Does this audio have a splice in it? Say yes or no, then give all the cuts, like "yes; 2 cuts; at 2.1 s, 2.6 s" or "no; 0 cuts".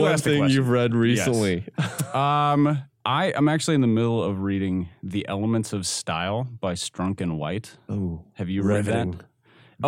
yes; 1 cut; at 2.9 s